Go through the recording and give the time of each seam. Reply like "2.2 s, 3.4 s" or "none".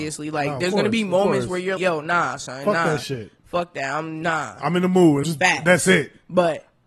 1.8 s, 5.2 s

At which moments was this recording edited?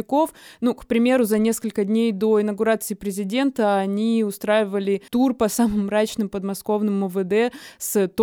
5.1 s

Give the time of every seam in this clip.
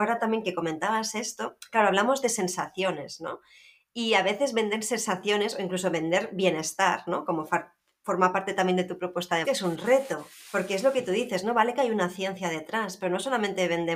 9.4 s

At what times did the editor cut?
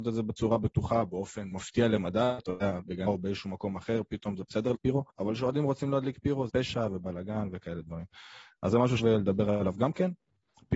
1.5 s, 3.1 s, 4.7 s, 5.1 s, 6.5 s, 9.0 s

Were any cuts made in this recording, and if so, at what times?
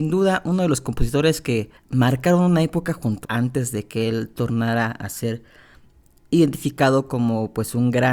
1.8 s, 3.2 s

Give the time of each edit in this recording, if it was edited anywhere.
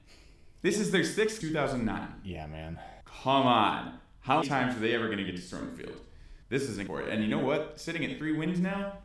1.4 s, 3.0 s, 4.4 s, 6.4 s, 6.9 s

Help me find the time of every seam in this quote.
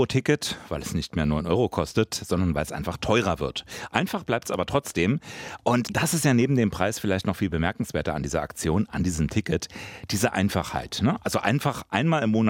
5.8 s

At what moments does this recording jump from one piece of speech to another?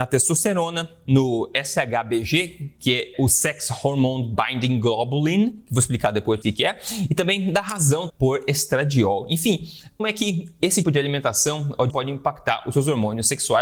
3.1 s, 6.4 s, 8.1 s, 10.0 s, 10.8 s, 11.9 s

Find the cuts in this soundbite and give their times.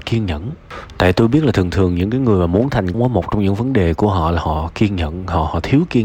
2.9 s

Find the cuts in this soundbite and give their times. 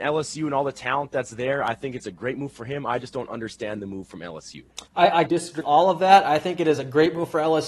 4.9 s, 5.3 s, 5.6 s

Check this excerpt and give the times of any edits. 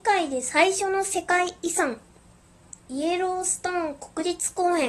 2.8 s

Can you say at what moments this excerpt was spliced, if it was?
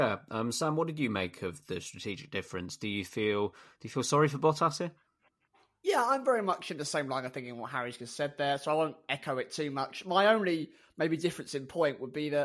none

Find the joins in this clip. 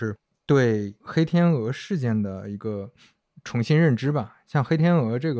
1.0 s

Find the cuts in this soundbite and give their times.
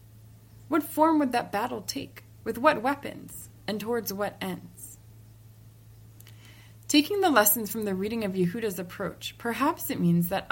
none

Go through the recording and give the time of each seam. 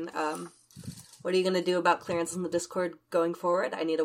2.3 s

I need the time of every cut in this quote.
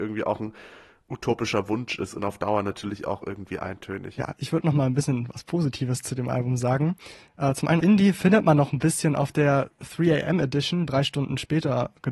7.8 s, 10.9 s

